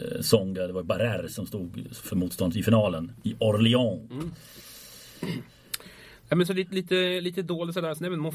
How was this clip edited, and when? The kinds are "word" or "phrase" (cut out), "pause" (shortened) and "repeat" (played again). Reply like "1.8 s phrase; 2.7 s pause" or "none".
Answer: none